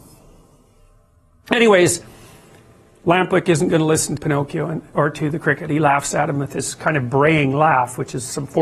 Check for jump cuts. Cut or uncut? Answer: cut